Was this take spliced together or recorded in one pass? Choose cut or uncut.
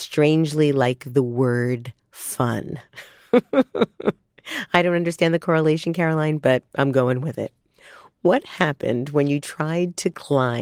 uncut